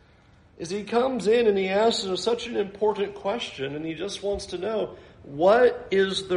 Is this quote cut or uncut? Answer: uncut